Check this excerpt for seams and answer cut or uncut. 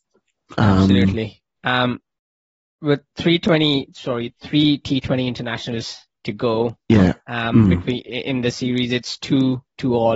uncut